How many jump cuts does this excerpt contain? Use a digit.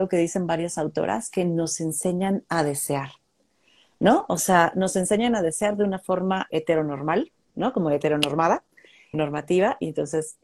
2